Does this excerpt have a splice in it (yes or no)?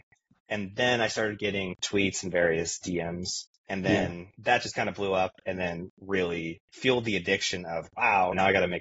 yes